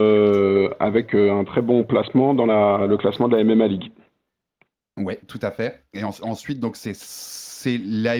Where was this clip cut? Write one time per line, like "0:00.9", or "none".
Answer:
none